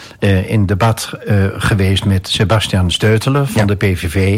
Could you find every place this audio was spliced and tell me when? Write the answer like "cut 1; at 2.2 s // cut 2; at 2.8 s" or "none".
none